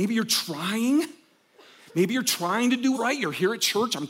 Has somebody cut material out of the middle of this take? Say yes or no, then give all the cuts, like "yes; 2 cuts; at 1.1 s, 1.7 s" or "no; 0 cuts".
yes; 1 cut; at 2.9 s